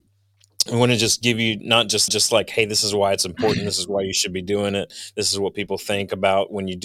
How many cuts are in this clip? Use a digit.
1